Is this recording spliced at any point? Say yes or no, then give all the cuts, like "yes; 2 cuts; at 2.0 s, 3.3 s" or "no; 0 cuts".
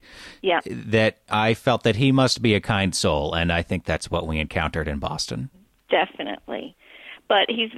no; 0 cuts